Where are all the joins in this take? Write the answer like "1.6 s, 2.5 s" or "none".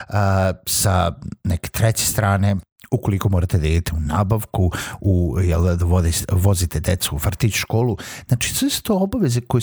none